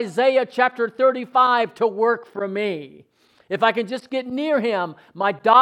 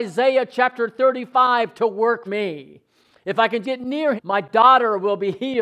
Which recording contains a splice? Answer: second; 3 cuts; at 2.3 s, 3.6 s, 4.2 s

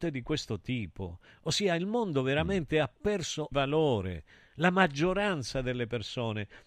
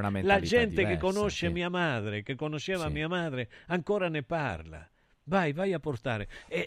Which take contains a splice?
first; 1 cut; at 3.5 s

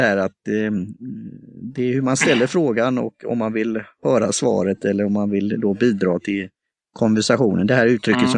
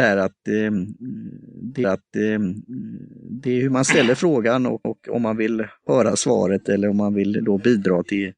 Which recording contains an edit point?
second; 2 cuts; at 1.8 s, 4.8 s

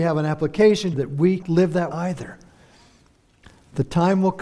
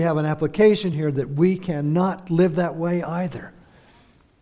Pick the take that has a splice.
first; 3 cuts; at 0.9 s, 1.4 s, 1.9 s

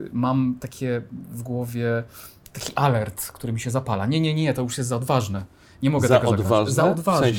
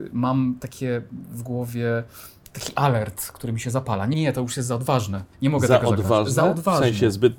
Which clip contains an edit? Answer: second; 2 cuts; at 4.1 s, 5.3 s

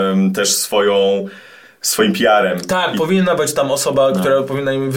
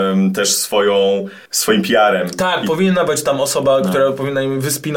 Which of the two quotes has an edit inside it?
second; 1 cut; at 1.5 s

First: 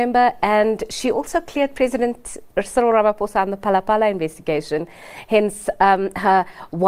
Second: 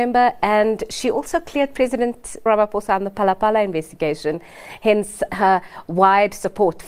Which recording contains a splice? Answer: second; 2 cuts; at 2.5 s, 5.3 s

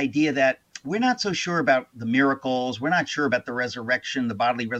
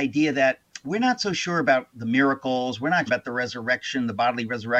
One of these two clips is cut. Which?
second; 1 cut; at 3.1 s

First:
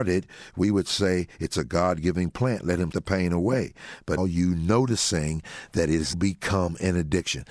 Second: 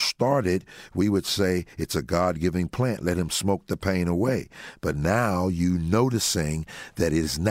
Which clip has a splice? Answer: first; 3 cuts; at 2.9 s, 4.2 s, 6.1 s

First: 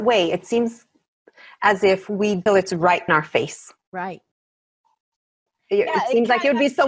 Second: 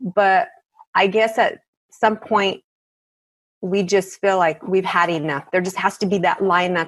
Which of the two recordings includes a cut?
first; 2 cuts; at 2.5 s, 3.1 s

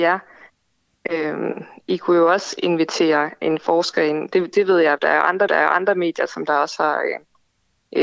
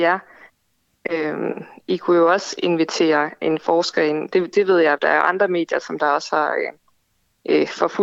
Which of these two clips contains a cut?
first; 1 cut; at 5.5 s

